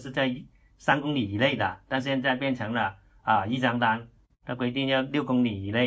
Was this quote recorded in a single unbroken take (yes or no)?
yes